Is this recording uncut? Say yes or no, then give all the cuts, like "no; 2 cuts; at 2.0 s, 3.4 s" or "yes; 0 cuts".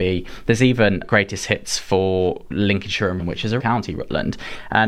no; 3 cuts; at 1.0 s, 3.2 s, 3.6 s